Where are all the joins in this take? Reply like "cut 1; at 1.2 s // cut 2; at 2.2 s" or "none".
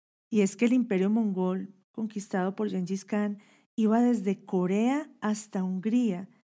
none